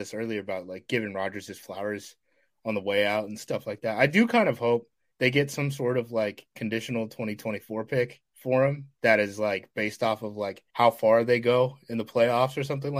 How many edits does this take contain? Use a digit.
3